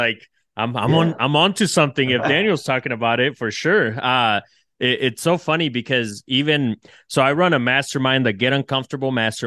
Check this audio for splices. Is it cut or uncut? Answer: uncut